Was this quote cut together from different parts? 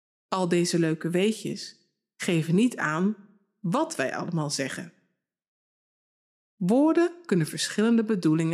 no; 0 cuts

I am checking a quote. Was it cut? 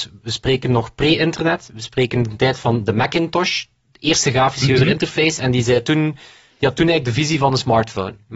no; 0 cuts

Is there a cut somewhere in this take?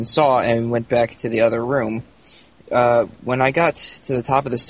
no; 0 cuts

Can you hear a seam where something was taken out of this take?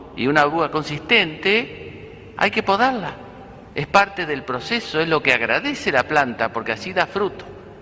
yes; 1 cut; at 3.7 s

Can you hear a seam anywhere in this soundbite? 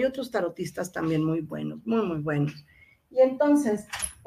no; 0 cuts

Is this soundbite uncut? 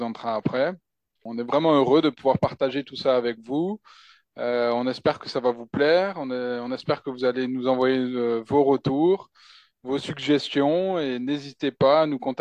yes; 0 cuts

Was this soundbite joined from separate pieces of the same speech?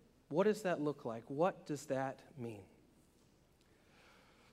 no; 0 cuts

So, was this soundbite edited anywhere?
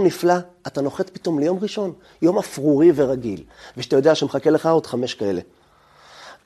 no; 0 cuts

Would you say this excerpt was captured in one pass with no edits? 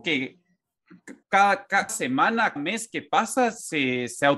no; 3 cuts; at 1.2 s, 1.9 s, 2.6 s

